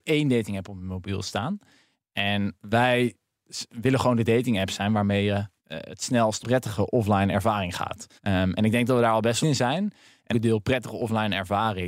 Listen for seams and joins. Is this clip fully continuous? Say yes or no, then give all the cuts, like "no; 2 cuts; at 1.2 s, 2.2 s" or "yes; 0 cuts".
no; 6 cuts; at 2.6 s, 5.6 s, 6.4 s, 8.2 s, 9.4 s, 10.3 s